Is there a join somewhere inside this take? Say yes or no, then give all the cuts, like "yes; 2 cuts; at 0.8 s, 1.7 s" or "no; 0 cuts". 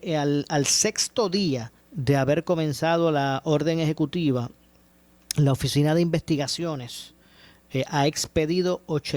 yes; 1 cut; at 1.8 s